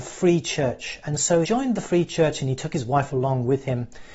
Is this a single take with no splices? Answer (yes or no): no